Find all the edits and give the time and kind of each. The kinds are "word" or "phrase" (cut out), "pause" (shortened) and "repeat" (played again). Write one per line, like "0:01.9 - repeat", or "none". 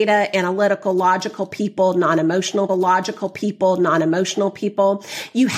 0:02.7 - repeat